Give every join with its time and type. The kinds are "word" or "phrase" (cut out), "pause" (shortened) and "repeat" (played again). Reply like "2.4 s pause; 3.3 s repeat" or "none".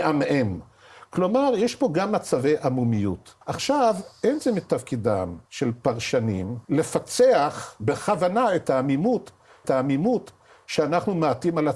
3.4 s pause; 5.5 s pause; 6.6 s pause; 9.6 s repeat